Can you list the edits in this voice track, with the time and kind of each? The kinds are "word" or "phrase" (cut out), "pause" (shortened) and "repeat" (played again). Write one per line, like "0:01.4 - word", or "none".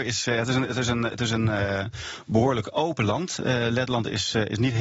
none